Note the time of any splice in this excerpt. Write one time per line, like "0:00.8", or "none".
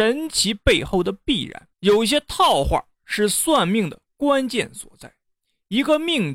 0:01.7